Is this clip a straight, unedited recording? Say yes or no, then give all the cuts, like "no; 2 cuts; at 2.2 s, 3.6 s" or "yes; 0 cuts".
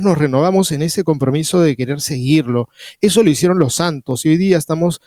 yes; 0 cuts